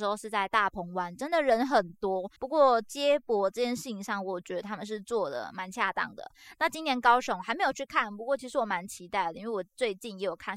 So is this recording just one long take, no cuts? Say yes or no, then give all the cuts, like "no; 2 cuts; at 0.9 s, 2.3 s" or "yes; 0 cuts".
no; 1 cut; at 2.4 s